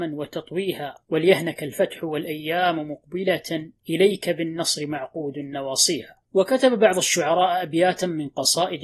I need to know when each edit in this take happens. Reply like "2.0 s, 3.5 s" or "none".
1.0 s, 3.8 s, 6.2 s